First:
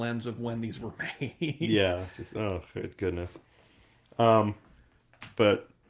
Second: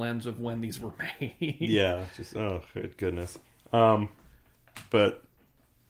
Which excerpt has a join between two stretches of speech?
second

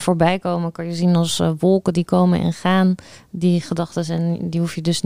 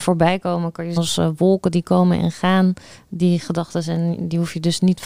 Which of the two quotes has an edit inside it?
second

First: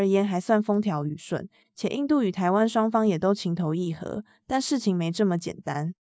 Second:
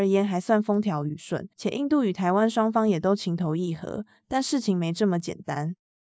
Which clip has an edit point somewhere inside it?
second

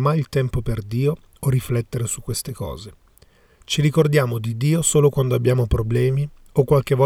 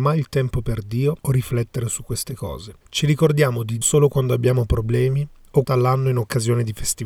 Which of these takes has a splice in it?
second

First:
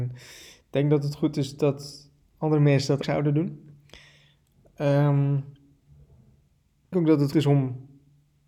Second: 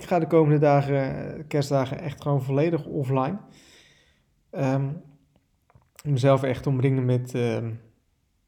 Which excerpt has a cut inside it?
first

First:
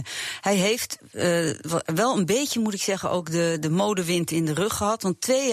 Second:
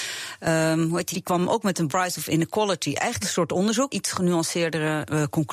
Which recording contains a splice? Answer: second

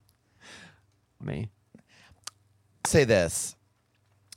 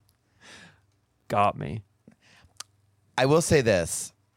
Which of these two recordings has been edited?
first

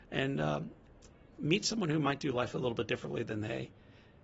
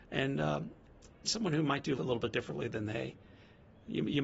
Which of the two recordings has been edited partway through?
second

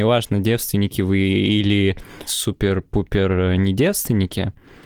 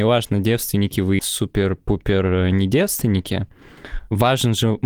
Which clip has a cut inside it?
second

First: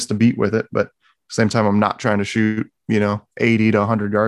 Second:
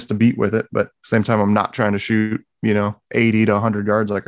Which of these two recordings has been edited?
second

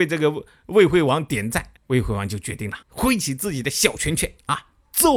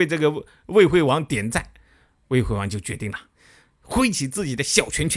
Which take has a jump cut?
first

